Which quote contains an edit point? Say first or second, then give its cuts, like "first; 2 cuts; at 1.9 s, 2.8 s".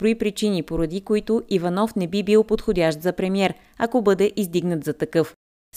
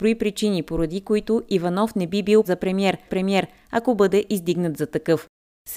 second; 2 cuts; at 2.4 s, 3.1 s